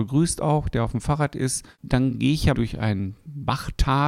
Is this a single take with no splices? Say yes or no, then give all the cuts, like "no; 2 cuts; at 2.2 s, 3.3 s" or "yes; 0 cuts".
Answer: no; 1 cut; at 2.5 s